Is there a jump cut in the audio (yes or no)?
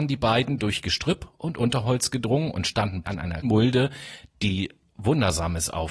yes